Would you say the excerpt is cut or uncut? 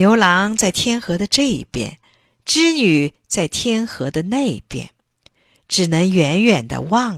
uncut